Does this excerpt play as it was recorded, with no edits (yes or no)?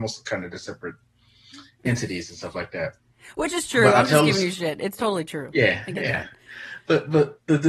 yes